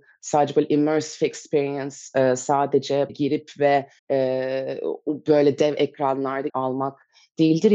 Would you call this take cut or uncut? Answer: cut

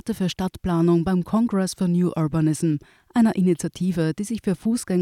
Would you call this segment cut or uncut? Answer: uncut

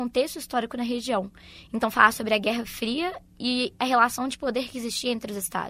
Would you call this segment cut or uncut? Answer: uncut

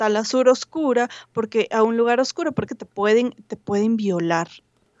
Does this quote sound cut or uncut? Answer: cut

